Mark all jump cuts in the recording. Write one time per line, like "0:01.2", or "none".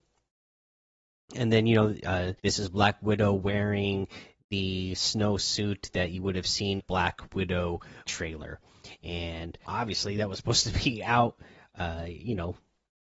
0:02.4
0:06.8
0:08.0
0:09.7